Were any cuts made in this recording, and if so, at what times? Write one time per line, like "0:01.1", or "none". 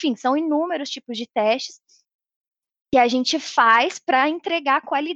none